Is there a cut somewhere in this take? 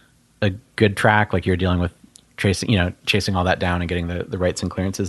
no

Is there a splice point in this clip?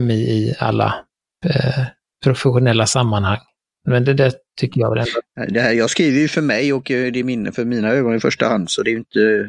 no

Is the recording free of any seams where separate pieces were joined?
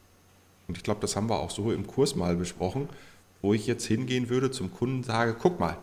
yes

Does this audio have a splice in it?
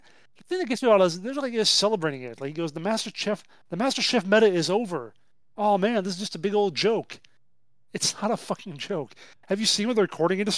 no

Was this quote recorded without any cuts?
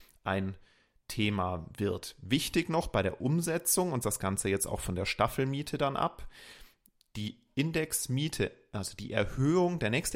no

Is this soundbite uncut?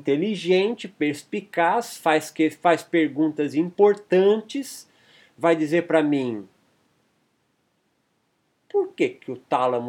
yes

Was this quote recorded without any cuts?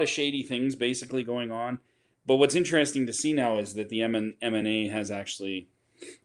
yes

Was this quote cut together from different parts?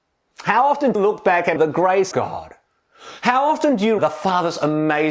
yes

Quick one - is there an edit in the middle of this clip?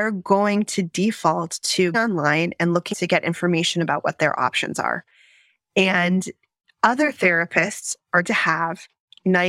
yes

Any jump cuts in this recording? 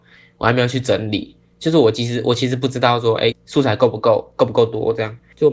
yes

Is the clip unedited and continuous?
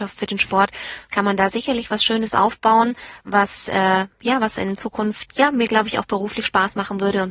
yes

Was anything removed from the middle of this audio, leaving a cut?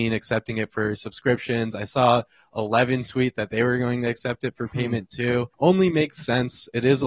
yes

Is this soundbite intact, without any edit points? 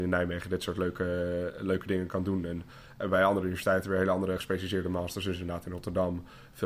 yes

